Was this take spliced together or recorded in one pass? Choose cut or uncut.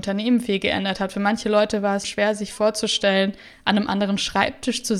cut